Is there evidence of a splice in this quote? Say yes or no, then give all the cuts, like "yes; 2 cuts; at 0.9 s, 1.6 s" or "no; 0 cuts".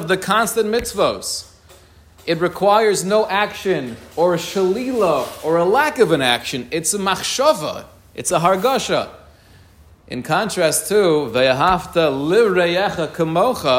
no; 0 cuts